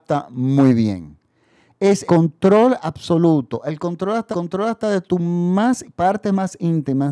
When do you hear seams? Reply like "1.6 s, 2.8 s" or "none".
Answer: 2.1 s, 4.3 s, 5.8 s